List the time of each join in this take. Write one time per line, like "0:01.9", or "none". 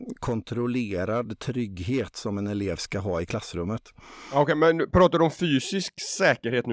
none